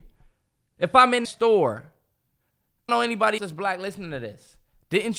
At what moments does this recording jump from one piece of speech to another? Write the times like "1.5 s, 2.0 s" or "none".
1.2 s, 2.9 s, 3.4 s

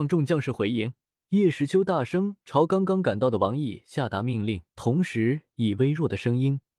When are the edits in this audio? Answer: 1.1 s, 4.7 s

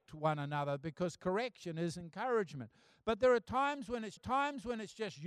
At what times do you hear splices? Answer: 4.2 s

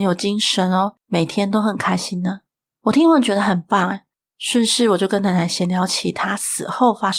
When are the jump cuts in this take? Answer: 1.0 s

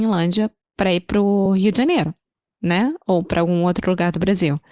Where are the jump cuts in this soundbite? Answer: none

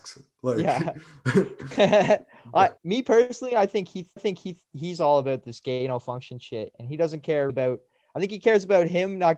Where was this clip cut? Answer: 2.8 s, 4.2 s, 7.5 s

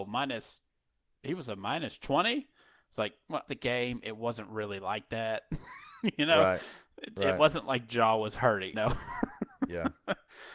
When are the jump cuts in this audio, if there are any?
3.5 s, 8.7 s

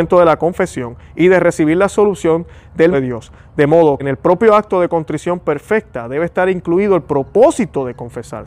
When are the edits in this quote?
2.9 s, 4.0 s

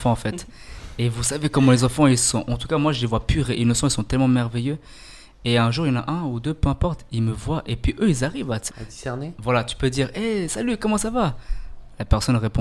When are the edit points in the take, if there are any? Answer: 8.7 s

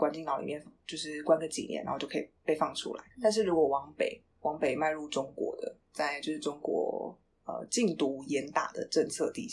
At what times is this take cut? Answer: 3.1 s, 4.3 s

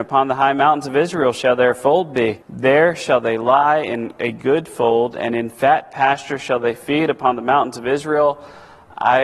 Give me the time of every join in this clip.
2.4 s

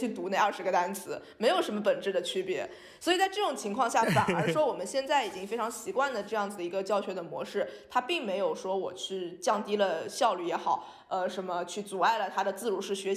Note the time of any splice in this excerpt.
none

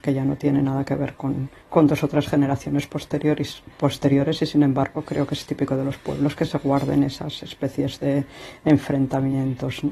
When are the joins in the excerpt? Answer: 1.6 s

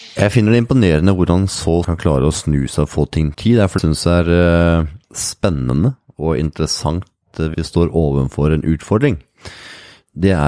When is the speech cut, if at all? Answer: 1.8 s, 3.3 s, 3.8 s, 5.0 s, 7.5 s

